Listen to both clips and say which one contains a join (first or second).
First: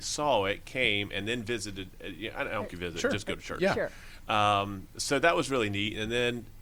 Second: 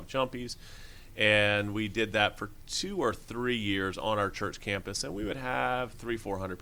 first